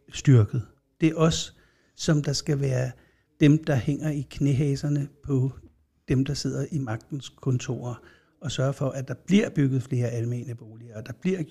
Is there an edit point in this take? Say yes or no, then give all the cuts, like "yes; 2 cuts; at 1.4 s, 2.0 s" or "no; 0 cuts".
no; 0 cuts